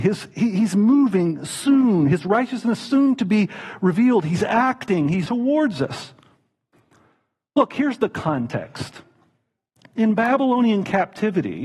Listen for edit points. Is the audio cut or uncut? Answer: cut